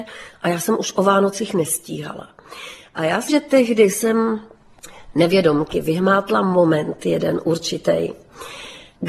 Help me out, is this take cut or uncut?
cut